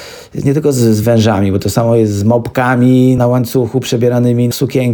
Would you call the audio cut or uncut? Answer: uncut